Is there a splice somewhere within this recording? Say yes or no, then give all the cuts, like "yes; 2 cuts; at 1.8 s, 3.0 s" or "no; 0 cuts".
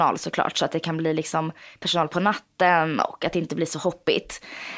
no; 0 cuts